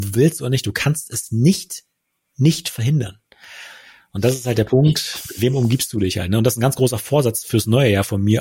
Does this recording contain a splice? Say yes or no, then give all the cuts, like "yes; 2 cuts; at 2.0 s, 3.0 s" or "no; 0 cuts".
no; 0 cuts